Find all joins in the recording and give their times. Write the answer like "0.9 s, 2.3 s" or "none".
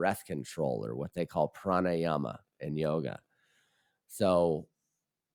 none